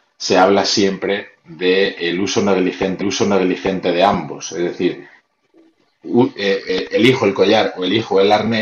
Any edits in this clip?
yes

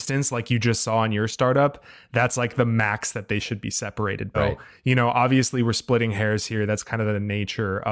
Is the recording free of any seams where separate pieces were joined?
no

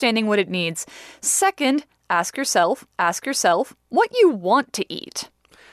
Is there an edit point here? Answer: yes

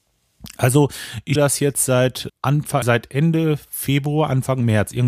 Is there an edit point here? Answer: yes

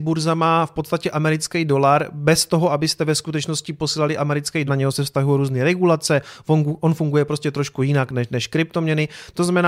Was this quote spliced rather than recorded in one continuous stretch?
yes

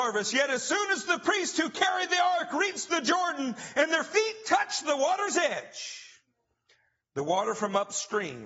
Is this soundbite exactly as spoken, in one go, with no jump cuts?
yes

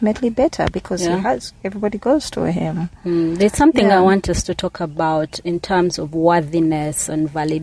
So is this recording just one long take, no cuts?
yes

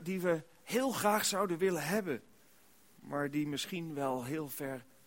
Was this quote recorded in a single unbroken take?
yes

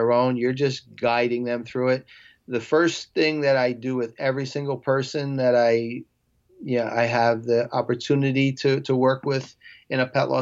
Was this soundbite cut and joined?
no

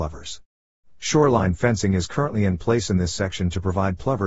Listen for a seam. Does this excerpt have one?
no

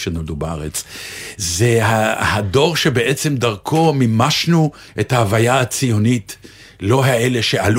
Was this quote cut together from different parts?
no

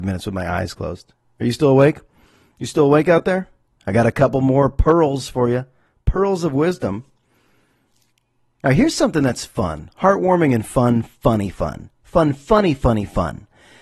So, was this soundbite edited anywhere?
no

